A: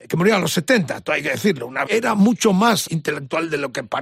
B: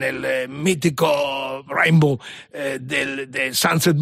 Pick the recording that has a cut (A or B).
A